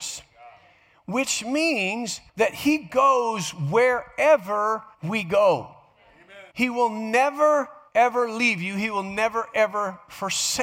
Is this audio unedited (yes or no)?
no